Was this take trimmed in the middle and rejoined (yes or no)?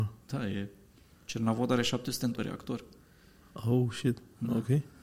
yes